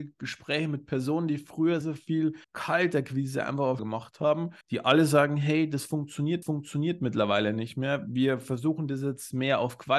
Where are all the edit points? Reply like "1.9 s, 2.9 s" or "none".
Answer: 1.8 s, 2.4 s, 3.8 s, 4.6 s, 6.4 s